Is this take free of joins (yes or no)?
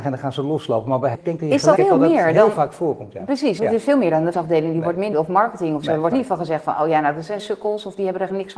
no